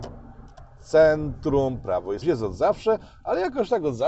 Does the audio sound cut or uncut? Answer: cut